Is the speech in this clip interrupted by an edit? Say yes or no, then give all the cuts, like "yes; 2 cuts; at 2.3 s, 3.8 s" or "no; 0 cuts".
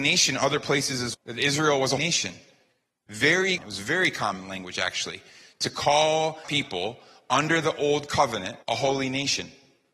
yes; 5 cuts; at 1.1 s, 2.0 s, 3.6 s, 6.4 s, 8.6 s